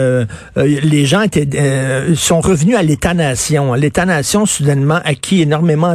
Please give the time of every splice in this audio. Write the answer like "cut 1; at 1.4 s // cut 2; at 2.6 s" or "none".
none